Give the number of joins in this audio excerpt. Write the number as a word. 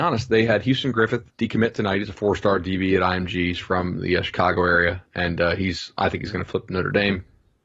one